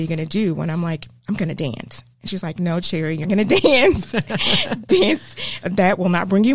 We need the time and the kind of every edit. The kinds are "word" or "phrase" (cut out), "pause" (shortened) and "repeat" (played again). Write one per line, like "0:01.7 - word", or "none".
0:01.2 - pause
0:02.1 - pause
0:03.2 - word
0:05.6 - word